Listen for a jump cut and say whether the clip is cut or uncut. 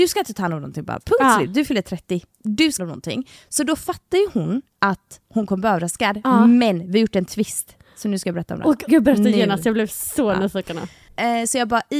cut